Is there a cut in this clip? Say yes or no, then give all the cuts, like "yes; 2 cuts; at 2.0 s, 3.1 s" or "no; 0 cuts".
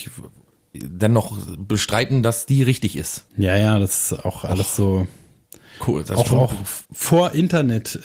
yes; 2 cuts; at 3.3 s, 6.9 s